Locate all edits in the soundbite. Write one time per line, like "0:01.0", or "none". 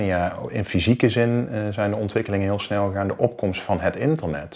none